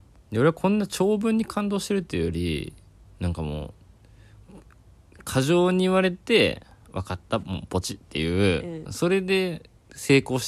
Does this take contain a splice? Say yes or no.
yes